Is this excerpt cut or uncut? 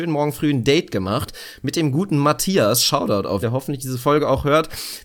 cut